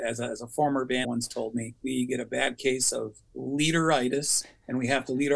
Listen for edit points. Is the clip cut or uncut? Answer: cut